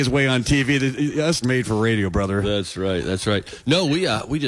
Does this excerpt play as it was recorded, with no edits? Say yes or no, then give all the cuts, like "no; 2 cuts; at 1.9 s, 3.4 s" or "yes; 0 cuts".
no; 1 cut; at 1.4 s